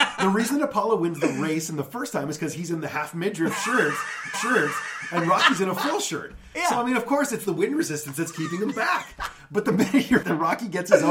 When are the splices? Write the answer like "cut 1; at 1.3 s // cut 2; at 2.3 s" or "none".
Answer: cut 1; at 4.3 s // cut 2; at 10.2 s